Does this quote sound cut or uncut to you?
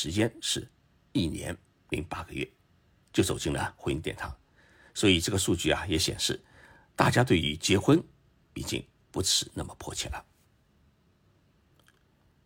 uncut